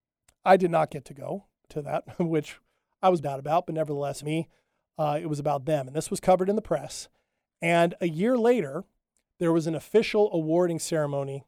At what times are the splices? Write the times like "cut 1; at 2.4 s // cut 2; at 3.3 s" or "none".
cut 1; at 1.7 s // cut 2; at 3.2 s // cut 3; at 4.2 s

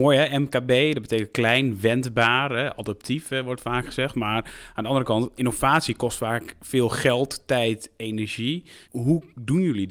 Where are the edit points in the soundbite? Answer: cut 1; at 5.4 s // cut 2; at 8.8 s

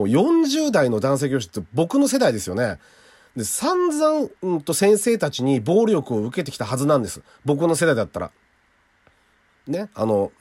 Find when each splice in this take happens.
cut 1; at 4.4 s

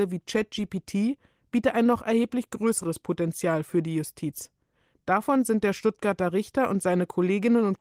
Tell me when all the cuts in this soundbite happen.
none

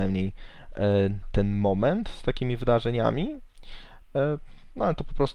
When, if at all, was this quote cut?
cut 1; at 1.2 s

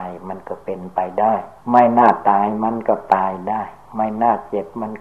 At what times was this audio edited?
cut 1; at 1.6 s

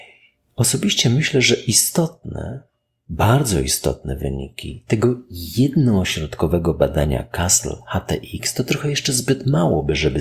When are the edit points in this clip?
none

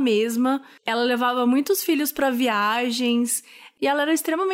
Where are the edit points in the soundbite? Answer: none

